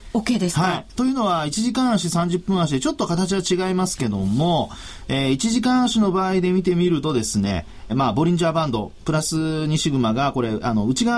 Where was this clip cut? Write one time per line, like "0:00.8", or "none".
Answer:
0:07.9

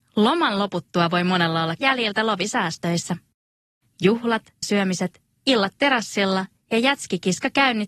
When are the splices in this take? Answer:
0:01.8
0:04.6

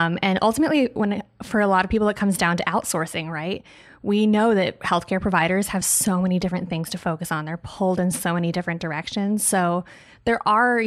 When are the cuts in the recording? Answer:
none

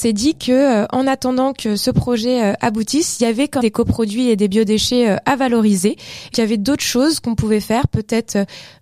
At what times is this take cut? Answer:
0:03.6
0:06.3

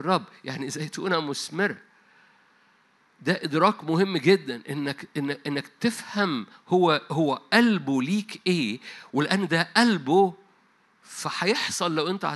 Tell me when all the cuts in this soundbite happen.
none

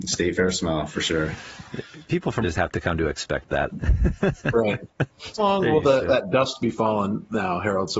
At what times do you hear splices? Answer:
0:02.4
0:05.4

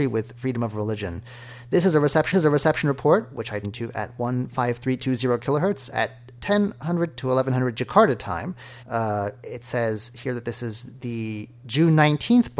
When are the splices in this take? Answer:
0:02.3
0:03.6
0:08.8

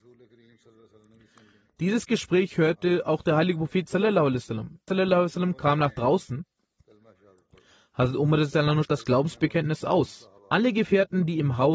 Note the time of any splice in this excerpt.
0:04.9
0:08.8
0:10.4

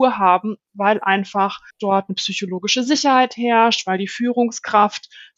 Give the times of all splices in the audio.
0:01.7

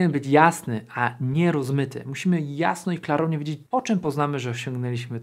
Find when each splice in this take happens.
0:03.7

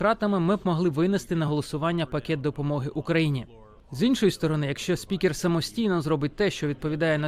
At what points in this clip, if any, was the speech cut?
none

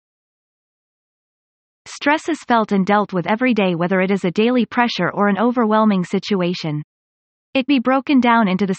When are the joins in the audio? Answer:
0:07.7

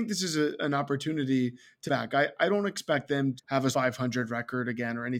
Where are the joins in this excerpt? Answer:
0:01.9
0:03.4
0:03.7

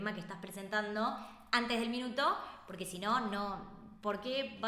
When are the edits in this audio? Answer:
none

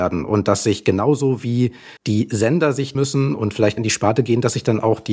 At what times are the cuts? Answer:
0:02.0
0:02.9
0:03.8

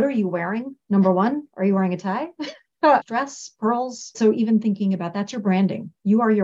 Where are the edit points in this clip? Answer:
none

